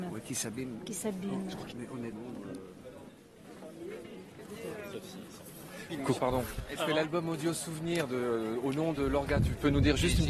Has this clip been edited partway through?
yes; 3 cuts; at 1.7 s, 6.2 s, 6.8 s

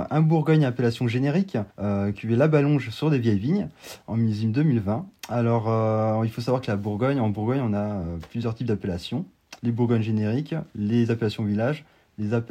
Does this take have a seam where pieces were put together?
yes; 2 cuts; at 1.7 s, 9.6 s

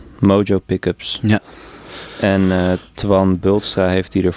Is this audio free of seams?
yes; 0 cuts

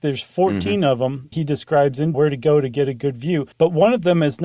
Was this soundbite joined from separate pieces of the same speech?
yes; 3 cuts; at 1.3 s, 2.1 s, 3.5 s

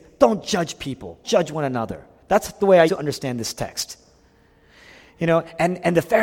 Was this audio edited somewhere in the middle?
yes; 2 cuts; at 1.2 s, 2.9 s

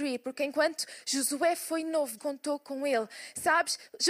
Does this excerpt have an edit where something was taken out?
yes; 1 cut; at 2.2 s

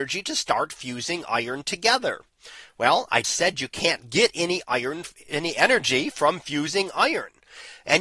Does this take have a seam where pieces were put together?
yes; 1 cut; at 3.2 s

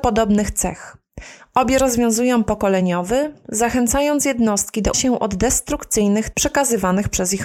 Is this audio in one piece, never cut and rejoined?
no; 3 cuts; at 2.5 s, 4.9 s, 6.3 s

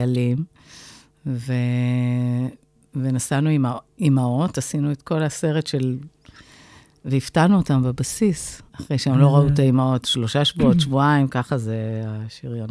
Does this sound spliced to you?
yes; 1 cut; at 8.7 s

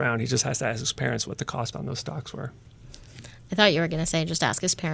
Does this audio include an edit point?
yes; 1 cut; at 1.7 s

